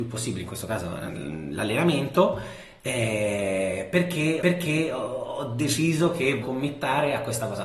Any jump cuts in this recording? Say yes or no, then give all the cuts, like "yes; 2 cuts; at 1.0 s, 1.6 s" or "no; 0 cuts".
yes; 2 cuts; at 4.4 s, 6.4 s